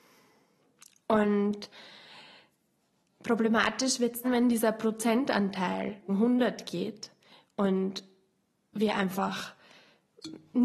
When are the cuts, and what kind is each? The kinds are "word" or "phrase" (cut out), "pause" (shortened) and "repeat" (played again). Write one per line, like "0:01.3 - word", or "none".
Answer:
0:04.2 - word
0:06.1 - word